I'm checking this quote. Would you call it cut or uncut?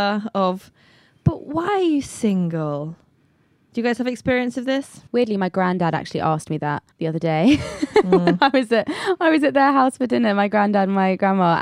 cut